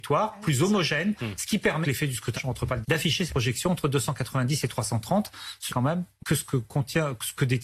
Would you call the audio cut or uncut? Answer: cut